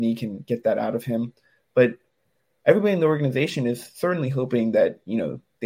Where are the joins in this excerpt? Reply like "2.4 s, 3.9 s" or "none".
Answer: none